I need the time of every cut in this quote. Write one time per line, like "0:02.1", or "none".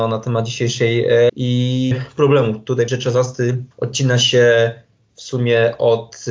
0:01.3
0:01.9
0:02.9
0:03.7